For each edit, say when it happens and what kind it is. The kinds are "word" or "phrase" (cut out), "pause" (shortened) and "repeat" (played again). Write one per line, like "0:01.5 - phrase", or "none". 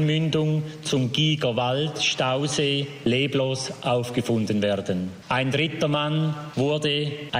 none